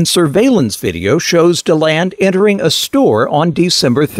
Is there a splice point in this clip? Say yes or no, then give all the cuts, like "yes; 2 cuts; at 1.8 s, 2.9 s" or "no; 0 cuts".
no; 0 cuts